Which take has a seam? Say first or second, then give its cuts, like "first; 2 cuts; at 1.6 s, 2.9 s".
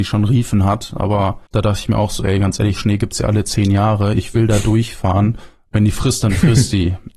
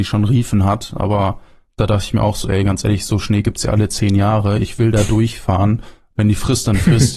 first; 2 cuts; at 1.5 s, 2.8 s